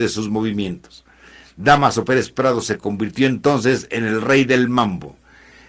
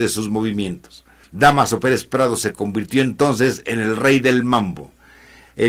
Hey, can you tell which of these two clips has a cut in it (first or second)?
second